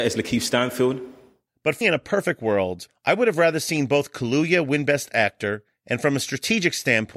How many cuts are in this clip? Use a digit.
1